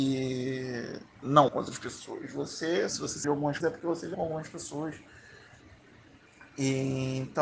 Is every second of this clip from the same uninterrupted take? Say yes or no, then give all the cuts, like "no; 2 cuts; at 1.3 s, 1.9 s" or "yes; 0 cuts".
no; 5 cuts; at 1.5 s, 2.9 s, 3.2 s, 3.6 s, 4.1 s